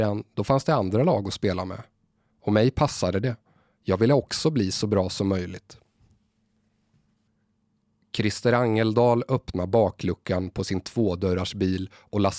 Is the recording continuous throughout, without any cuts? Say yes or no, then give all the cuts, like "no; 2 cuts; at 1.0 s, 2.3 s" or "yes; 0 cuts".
yes; 0 cuts